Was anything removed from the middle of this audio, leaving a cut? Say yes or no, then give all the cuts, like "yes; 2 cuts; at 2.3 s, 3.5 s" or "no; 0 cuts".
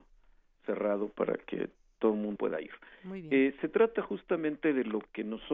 yes; 1 cut; at 2.4 s